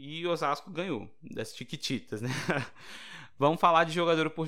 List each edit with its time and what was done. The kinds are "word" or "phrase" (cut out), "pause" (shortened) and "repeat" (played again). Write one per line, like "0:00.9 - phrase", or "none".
none